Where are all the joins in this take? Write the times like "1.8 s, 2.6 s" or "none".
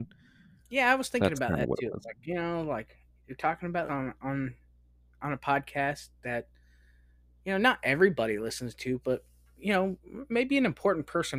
3.9 s